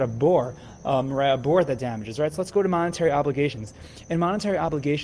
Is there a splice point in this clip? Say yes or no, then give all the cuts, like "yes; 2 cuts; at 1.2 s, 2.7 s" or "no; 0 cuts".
no; 0 cuts